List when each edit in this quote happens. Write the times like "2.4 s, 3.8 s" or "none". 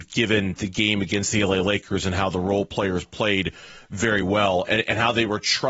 none